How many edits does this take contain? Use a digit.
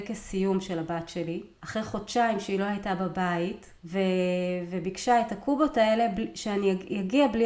2